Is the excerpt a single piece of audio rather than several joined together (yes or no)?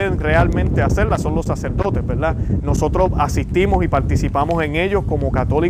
yes